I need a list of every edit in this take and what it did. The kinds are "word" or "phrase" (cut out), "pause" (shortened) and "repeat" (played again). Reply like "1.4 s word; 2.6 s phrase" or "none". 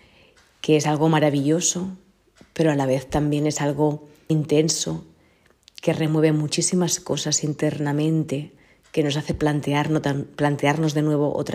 4.3 s word